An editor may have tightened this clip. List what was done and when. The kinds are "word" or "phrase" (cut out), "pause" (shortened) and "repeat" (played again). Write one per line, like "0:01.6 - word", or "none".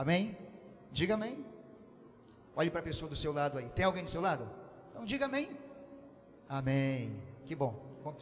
none

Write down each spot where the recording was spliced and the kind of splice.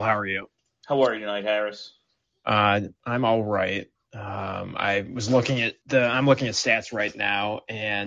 0:02.9 - pause
0:05.8 - pause

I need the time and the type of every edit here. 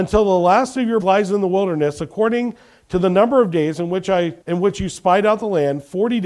0:01.0 - word
0:04.4 - pause

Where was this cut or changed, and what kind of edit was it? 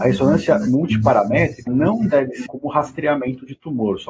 0:01.7 - word
0:02.5 - word

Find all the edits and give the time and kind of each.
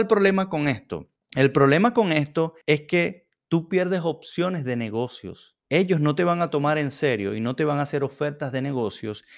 0:01.2 - pause
0:02.6 - pause
0:05.6 - pause

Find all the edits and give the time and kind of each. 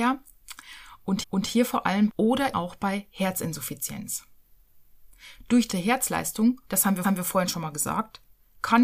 0:01.2 - repeat
0:02.1 - phrase
0:02.5 - word
0:05.7 - word
0:06.7 - pause
0:07.0 - repeat

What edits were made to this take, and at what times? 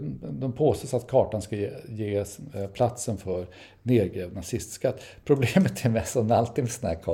none

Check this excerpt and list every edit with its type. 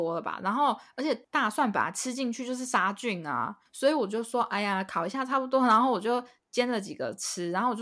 none

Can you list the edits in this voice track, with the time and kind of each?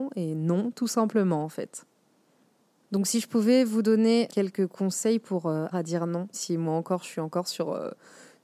0:04.3 - word
0:05.7 - word
0:06.3 - word

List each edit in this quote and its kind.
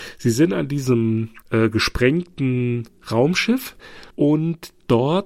0:01.4 - pause
0:04.1 - pause

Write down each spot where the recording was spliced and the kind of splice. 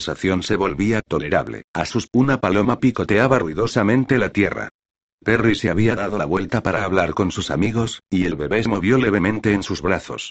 0:01.7 - pause
0:02.1 - word

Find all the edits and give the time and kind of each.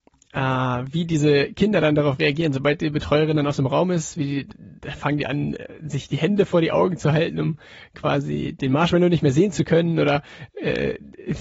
none

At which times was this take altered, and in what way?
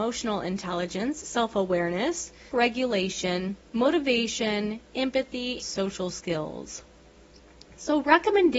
0:01.2 - word
0:02.5 - word
0:03.7 - pause
0:05.6 - word

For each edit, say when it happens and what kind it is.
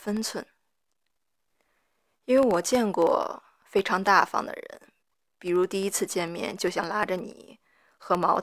none

